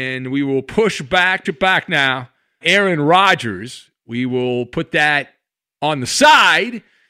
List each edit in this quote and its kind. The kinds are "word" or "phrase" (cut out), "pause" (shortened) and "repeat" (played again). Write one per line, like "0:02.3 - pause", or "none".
0:01.4 - word
0:02.6 - word